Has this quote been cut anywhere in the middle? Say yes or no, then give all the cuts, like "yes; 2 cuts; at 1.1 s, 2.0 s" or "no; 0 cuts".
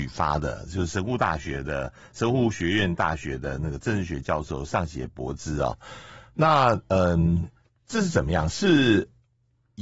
no; 0 cuts